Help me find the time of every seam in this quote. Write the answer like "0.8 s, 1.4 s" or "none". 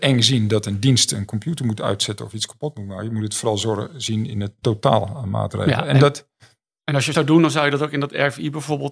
7.1 s